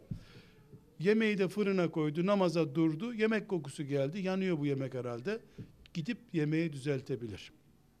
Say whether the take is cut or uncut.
uncut